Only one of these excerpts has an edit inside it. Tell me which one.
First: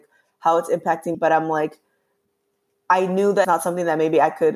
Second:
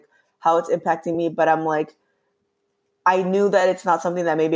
first; 2 cuts; at 1.1 s, 3.4 s

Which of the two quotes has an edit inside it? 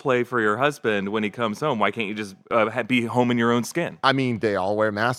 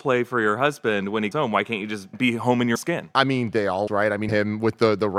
second; 5 cuts; at 1.3 s, 2.1 s, 2.8 s, 3.9 s, 4.3 s

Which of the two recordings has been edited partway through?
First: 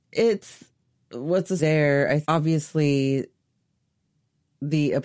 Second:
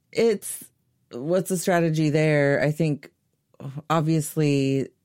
first; 2 cuts; at 1.6 s, 2.2 s

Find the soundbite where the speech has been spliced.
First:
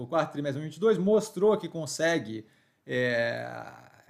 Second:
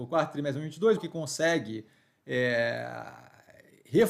second; 1 cut; at 1.0 s

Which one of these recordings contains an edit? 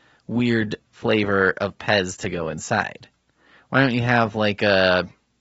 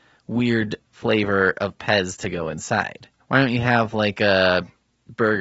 second; 1 cut; at 3.2 s

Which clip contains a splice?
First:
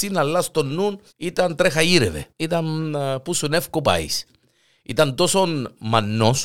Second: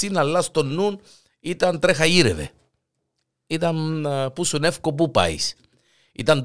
first; 3 cuts; at 1.1 s, 2.3 s, 3.8 s

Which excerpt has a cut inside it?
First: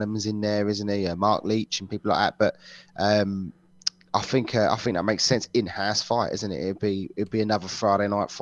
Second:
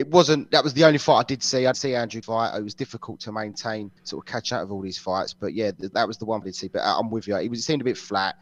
second; 5 cuts; at 1.7 s, 2.2 s, 4.0 s, 5.9 s, 6.4 s

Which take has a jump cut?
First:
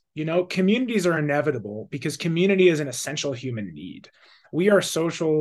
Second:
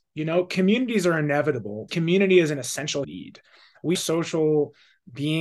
second; 3 cuts; at 1.9 s, 3.0 s, 3.9 s

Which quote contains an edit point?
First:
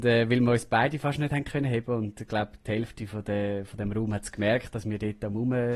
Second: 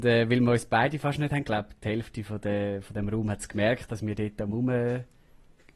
second; 1 cut; at 1.4 s

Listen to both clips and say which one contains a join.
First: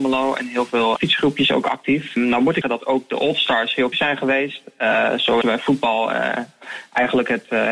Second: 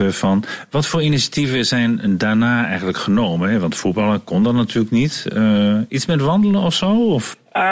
first; 4 cuts; at 1.0 s, 2.6 s, 3.9 s, 5.4 s

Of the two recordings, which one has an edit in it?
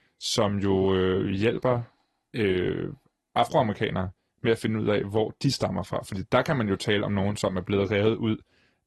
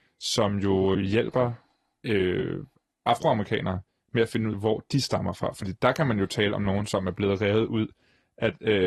second; 2 cuts; at 0.9 s, 4.5 s

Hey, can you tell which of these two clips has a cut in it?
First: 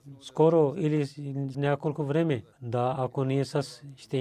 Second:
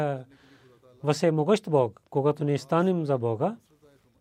first; 2 cuts; at 1.5 s, 2.5 s

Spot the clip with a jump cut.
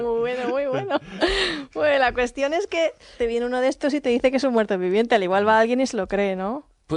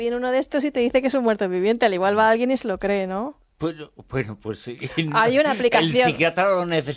first; 1 cut; at 3.2 s

